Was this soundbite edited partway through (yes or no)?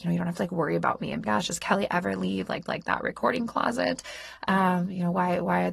yes